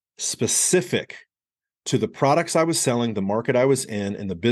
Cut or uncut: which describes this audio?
uncut